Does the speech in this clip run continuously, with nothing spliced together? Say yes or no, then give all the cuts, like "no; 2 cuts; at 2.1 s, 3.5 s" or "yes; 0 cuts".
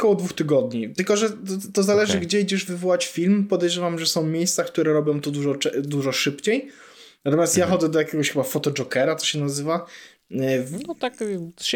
yes; 0 cuts